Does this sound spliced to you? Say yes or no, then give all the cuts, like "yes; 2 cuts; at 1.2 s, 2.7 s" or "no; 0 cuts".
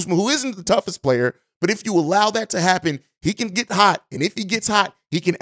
no; 0 cuts